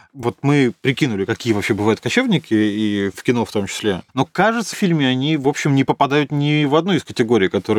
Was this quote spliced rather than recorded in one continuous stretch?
yes; 2 cuts; at 4.1 s, 4.7 s

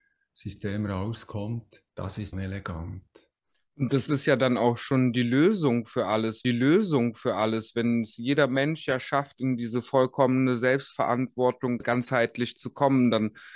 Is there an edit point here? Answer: yes; 3 cuts; at 1.9 s, 2.3 s, 6.4 s

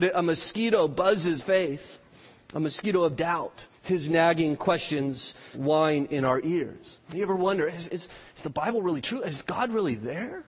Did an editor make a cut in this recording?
yes; 4 cuts; at 1.4 s, 3.8 s, 5.5 s, 7.0 s

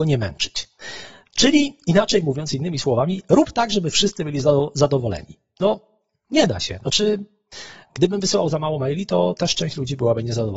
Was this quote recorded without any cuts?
yes; 0 cuts

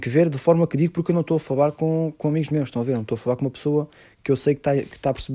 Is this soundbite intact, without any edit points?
yes; 0 cuts

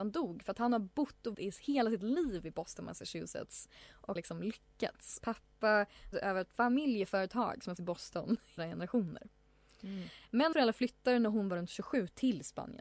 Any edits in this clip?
yes; 7 cuts; at 1.3 s, 4.2 s, 5.2 s, 6.1 s, 7.8 s, 8.6 s, 10.5 s

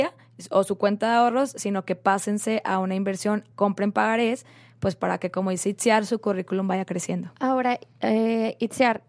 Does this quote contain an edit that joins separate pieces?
yes; 1 cut; at 3.5 s

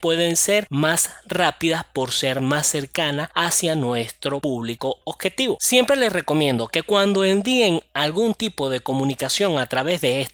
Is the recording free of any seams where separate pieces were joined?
yes; 0 cuts

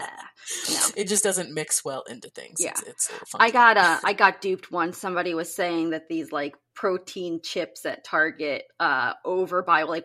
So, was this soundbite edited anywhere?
no; 0 cuts

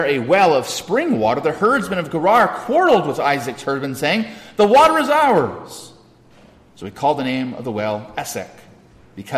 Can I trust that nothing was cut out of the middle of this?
yes; 0 cuts

